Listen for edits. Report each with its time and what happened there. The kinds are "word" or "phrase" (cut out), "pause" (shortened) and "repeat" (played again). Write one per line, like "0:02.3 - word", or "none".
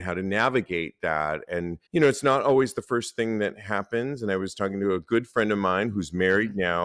0:01.9 - pause